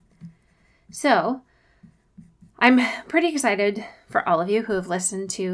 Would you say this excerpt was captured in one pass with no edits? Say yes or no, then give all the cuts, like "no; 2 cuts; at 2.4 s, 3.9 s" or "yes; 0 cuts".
yes; 0 cuts